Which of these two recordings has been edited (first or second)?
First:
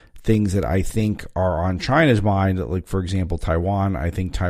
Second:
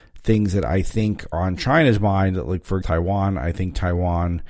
second